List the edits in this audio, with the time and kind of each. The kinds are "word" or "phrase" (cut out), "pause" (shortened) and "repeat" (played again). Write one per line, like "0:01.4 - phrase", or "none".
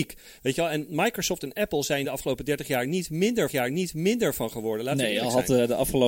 0:02.0 - phrase
0:03.5 - repeat